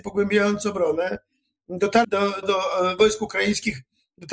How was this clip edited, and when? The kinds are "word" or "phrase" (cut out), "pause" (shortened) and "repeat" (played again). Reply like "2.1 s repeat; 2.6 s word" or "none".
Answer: 2.0 s word; 2.4 s word